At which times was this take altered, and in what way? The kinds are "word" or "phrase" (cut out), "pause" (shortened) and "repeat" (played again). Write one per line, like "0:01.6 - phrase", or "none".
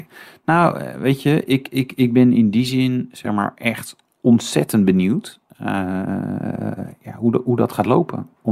none